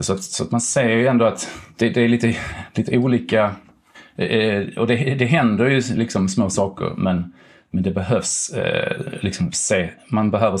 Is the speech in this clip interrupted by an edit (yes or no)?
no